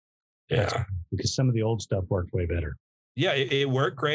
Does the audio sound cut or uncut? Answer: uncut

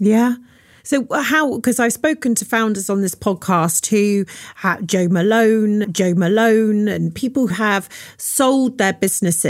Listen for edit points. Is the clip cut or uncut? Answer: cut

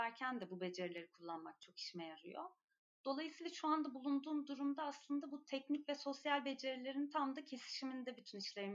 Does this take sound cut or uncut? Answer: uncut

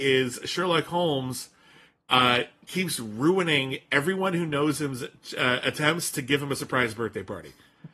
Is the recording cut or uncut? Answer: uncut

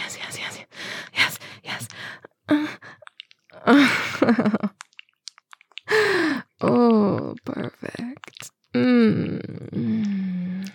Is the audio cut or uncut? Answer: uncut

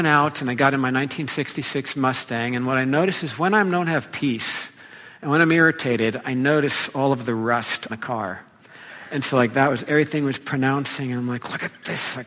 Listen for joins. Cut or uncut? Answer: cut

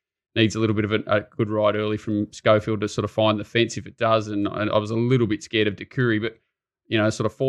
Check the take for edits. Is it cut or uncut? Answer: uncut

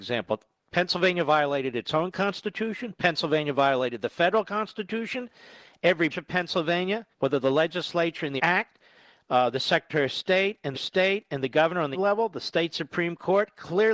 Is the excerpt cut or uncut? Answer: cut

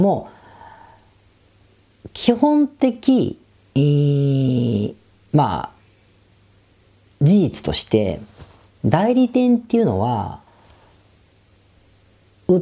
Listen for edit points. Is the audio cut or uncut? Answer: uncut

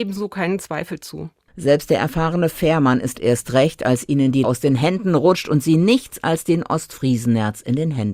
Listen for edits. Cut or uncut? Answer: cut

